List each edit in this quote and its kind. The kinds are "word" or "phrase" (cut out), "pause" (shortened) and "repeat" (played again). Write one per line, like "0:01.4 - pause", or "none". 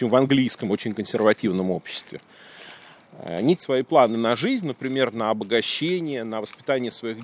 0:03.6 - phrase